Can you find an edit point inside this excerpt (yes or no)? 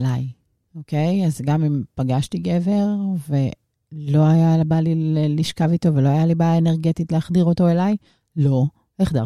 no